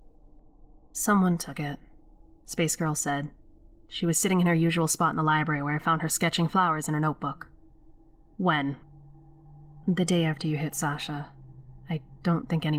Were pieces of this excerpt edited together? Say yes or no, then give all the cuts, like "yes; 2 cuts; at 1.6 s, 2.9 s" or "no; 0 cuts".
yes; 1 cut; at 9.8 s